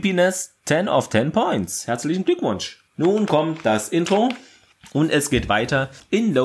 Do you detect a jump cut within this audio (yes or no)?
yes